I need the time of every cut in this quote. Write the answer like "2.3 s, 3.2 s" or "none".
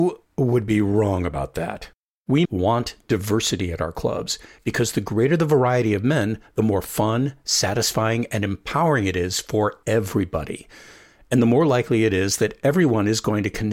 2.4 s